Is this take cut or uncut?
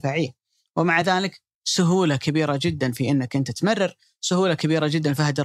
uncut